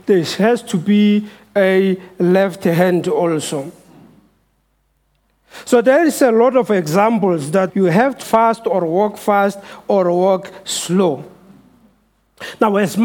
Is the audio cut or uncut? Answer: cut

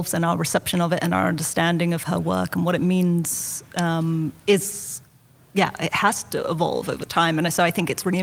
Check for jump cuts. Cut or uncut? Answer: uncut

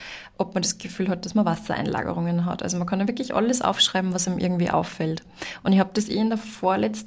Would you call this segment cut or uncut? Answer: uncut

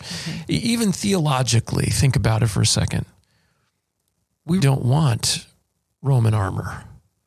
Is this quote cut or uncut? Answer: cut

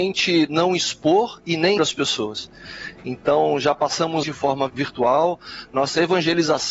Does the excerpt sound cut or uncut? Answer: cut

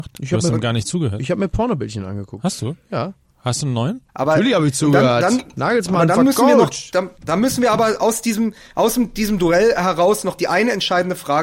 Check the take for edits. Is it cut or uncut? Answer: cut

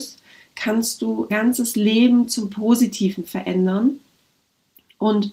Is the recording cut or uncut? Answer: cut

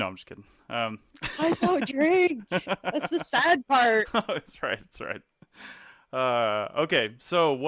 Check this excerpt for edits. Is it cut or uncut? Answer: uncut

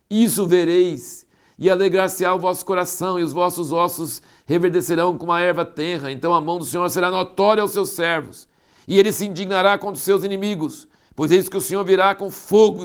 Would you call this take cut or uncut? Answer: uncut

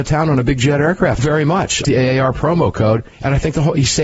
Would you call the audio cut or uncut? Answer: cut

